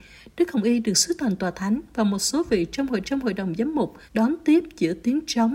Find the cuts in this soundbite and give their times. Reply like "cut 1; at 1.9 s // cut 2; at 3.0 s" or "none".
cut 1; at 3.0 s // cut 2; at 4.1 s